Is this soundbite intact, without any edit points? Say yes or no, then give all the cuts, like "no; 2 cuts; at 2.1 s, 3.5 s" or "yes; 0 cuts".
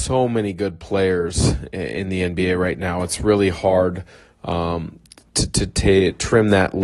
yes; 0 cuts